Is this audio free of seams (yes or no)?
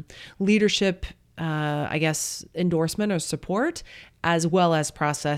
yes